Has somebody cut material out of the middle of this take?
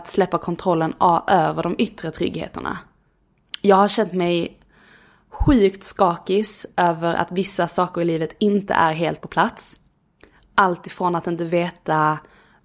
no; 0 cuts

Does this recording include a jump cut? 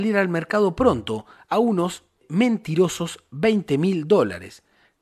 no; 0 cuts

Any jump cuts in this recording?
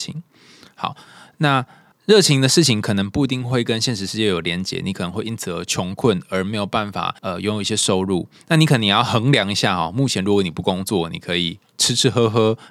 yes; 2 cuts; at 1.9 s, 7.2 s

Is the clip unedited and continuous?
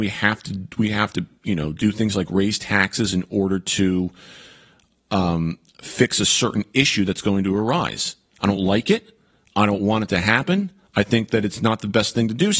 yes; 0 cuts

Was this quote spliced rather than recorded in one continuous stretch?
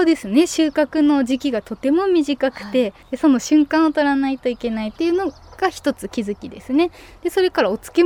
yes; 1 cut; at 3.0 s

